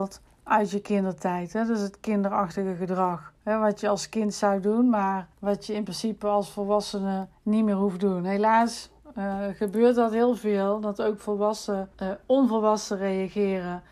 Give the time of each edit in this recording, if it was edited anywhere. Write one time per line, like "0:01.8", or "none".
0:05.3
0:07.3
0:11.9